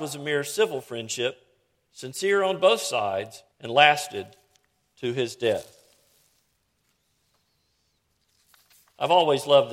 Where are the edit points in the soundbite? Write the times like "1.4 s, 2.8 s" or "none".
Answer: 3.5 s